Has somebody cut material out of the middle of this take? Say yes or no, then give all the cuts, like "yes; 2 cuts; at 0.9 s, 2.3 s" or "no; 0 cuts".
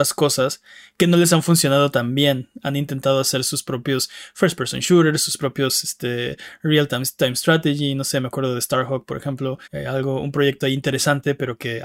yes; 1 cut; at 9.6 s